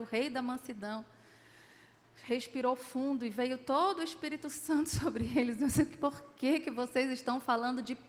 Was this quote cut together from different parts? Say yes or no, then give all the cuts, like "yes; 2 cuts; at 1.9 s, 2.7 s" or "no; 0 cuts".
no; 0 cuts